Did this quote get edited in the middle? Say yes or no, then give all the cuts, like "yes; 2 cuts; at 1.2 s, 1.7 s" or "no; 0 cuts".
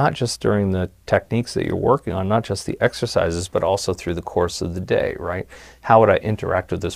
no; 0 cuts